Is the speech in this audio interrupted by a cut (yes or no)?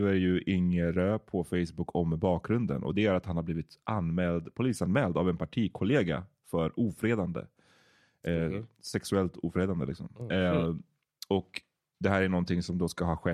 no